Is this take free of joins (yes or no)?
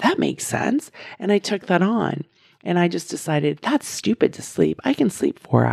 yes